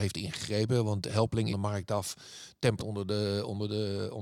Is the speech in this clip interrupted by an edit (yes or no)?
yes